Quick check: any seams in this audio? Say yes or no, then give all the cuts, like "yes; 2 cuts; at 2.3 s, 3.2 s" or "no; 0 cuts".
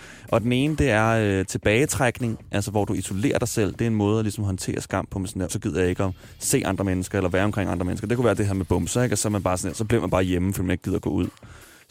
yes; 1 cut; at 5.5 s